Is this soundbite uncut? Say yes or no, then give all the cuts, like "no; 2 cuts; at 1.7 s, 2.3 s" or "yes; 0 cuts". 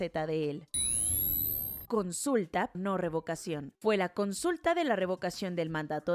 no; 2 cuts; at 1.9 s, 2.7 s